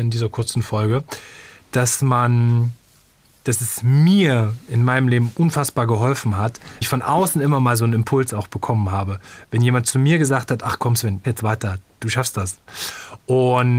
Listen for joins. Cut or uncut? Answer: cut